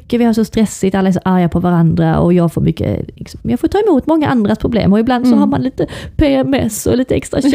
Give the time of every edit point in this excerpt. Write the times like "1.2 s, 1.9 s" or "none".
none